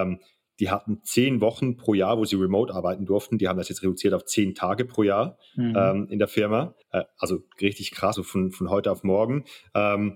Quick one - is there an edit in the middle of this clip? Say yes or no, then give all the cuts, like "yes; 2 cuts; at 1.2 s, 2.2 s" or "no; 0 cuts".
yes; 2 cuts; at 6.8 s, 8.1 s